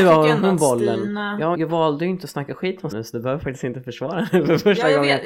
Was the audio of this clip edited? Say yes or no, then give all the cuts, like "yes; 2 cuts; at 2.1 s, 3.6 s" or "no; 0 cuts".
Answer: yes; 2 cuts; at 1.5 s, 2.9 s